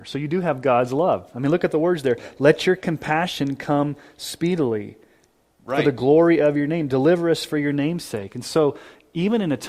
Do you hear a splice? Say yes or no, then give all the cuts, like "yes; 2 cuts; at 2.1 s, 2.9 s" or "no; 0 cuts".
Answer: no; 0 cuts